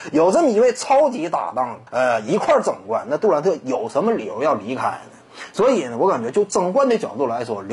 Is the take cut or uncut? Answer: cut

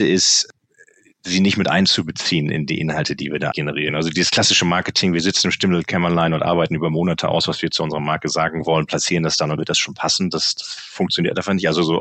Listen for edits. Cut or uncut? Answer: cut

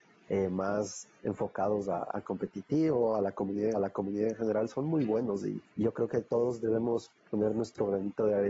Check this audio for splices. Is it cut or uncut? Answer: cut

